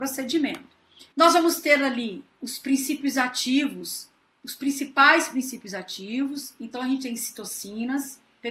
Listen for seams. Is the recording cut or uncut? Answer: cut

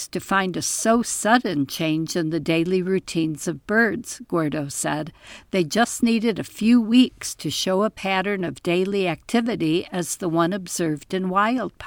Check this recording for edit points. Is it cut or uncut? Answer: uncut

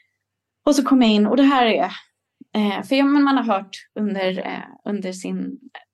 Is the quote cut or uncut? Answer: uncut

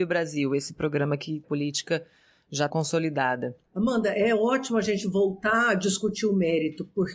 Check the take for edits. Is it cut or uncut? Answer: cut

